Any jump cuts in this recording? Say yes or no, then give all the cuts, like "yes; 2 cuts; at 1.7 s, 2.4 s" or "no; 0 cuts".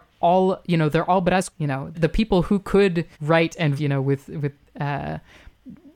yes; 4 cuts; at 1.5 s, 1.9 s, 3.1 s, 3.8 s